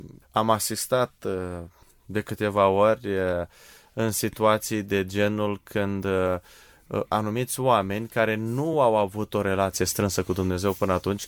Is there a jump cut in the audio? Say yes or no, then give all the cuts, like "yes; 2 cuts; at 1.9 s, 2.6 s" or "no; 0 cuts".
no; 0 cuts